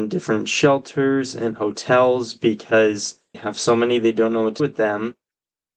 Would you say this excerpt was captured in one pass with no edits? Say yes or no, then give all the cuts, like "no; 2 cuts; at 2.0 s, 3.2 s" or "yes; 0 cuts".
no; 2 cuts; at 3.3 s, 4.6 s